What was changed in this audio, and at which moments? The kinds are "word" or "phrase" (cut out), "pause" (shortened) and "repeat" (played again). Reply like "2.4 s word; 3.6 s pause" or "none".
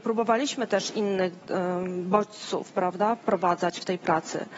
none